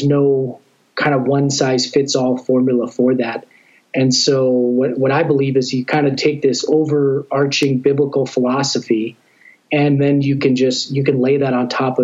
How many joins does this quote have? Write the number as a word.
zero